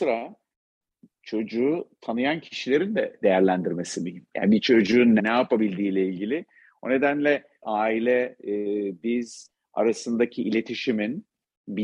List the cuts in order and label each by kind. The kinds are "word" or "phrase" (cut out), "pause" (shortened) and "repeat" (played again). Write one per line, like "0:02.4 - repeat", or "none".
0:03.2 - word
0:05.2 - word
0:07.6 - phrase